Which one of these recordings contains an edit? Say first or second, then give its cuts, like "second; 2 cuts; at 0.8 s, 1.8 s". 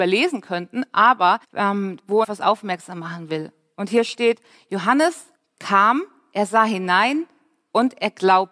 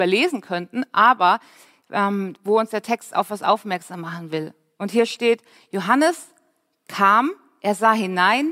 first; 3 cuts; at 1.4 s, 2.2 s, 5.3 s